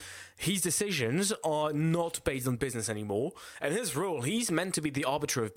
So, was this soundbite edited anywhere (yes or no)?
no